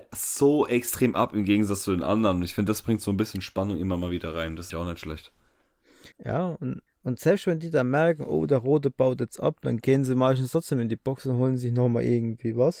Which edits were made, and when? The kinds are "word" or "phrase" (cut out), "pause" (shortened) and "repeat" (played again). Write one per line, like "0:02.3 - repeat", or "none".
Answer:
0:04.7 - word
0:06.1 - pause
0:06.9 - pause